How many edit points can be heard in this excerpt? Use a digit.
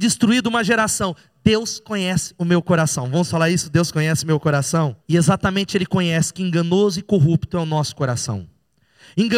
1